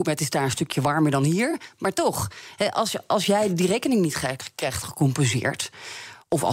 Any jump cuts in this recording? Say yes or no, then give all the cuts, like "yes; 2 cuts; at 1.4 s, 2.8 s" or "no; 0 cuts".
no; 0 cuts